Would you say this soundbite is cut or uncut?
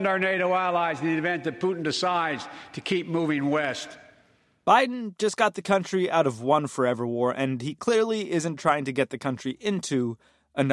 uncut